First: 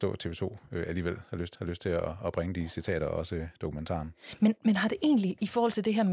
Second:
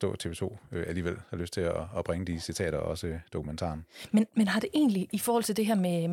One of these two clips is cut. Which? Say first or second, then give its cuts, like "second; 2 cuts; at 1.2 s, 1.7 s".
first; 1 cut; at 1.5 s